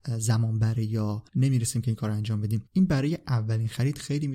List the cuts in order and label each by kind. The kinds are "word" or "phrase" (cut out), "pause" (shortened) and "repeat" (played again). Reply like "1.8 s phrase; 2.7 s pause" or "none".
1.3 s pause; 2.7 s pause